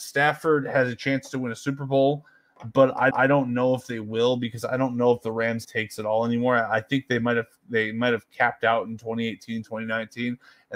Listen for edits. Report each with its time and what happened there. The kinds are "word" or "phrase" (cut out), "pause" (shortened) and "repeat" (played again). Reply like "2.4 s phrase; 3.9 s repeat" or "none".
3.1 s repeat; 5.6 s phrase